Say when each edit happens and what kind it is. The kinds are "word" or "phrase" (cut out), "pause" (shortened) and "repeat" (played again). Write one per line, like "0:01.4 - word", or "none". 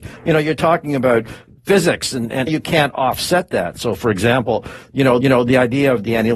0:02.5 - phrase
0:05.2 - repeat